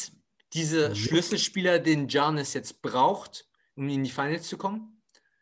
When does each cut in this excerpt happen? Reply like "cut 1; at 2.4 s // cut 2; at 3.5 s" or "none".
none